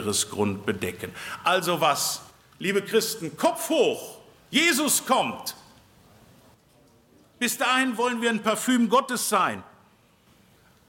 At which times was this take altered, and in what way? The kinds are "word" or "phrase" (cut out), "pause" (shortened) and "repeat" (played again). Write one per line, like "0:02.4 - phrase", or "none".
none